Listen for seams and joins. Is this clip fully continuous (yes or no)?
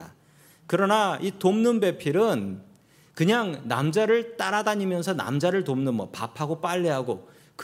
yes